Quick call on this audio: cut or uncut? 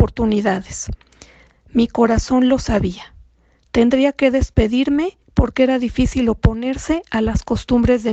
uncut